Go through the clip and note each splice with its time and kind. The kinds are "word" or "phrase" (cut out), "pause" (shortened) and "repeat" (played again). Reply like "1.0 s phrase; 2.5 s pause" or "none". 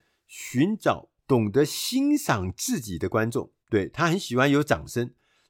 1.2 s pause; 3.6 s pause